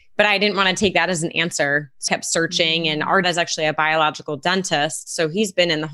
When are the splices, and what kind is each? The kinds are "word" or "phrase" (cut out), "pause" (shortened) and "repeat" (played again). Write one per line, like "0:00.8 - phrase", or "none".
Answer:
0:02.1 - word
0:03.2 - word